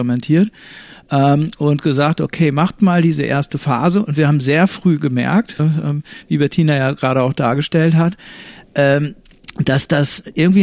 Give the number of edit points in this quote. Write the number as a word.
one